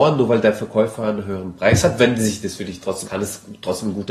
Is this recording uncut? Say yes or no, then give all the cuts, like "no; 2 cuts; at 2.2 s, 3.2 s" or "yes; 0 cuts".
no; 1 cut; at 3.0 s